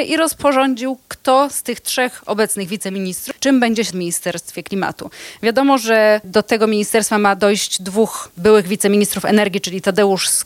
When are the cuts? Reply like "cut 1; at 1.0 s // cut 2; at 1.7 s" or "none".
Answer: cut 1; at 3.9 s